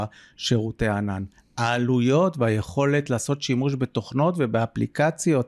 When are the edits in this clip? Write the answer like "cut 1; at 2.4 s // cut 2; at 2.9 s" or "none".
none